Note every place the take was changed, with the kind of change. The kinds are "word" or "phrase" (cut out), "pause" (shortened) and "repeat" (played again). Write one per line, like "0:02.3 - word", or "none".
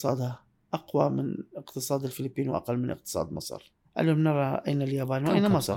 none